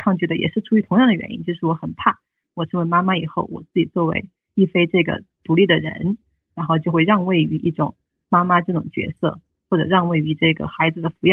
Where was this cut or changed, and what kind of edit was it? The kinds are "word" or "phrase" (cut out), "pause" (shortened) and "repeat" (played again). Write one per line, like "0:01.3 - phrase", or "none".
none